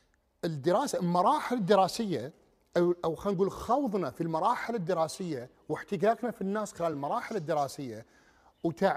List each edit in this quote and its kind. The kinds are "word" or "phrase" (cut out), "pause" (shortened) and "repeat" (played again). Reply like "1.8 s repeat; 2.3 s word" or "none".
none